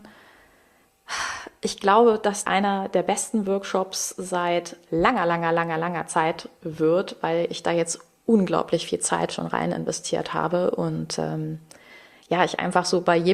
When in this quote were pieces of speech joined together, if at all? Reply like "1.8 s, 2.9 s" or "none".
2.4 s